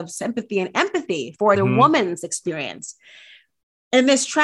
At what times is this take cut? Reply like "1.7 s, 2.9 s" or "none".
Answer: 1.5 s